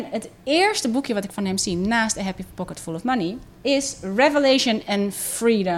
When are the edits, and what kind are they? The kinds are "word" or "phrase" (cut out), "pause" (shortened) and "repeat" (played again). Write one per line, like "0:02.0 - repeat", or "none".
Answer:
none